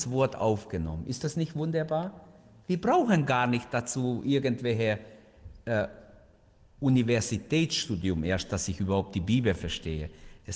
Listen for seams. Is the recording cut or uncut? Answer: uncut